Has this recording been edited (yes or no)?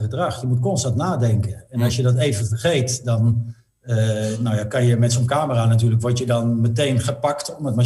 no